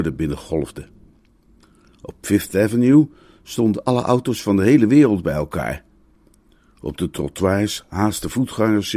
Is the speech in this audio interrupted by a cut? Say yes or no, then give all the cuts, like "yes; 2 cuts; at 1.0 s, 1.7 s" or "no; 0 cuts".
no; 0 cuts